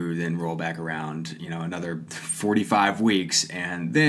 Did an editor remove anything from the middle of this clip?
no; 0 cuts

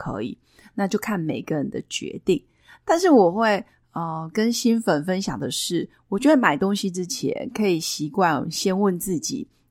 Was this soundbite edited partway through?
no; 0 cuts

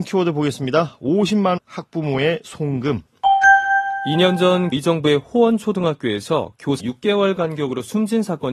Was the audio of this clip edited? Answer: yes; 3 cuts; at 1.6 s, 4.7 s, 6.8 s

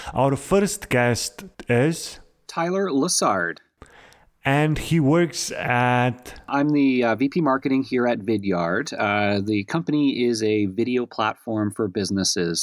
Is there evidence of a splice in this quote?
no; 0 cuts

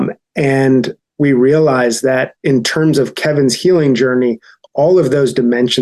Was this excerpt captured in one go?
no; 1 cut; at 2.4 s

